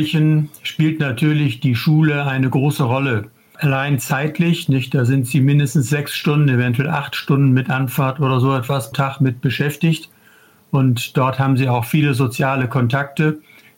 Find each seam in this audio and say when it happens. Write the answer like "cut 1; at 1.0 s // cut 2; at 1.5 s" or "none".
cut 1; at 8.9 s